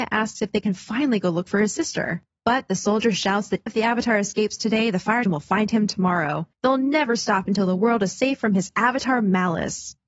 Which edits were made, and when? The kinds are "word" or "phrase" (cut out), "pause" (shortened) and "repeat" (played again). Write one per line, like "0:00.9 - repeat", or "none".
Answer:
0:03.7 - word
0:05.2 - word
0:06.5 - pause